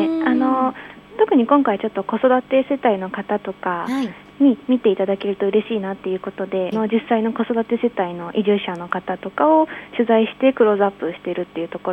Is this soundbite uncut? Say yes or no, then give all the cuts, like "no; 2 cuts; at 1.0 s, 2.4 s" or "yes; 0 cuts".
no; 1 cut; at 6.7 s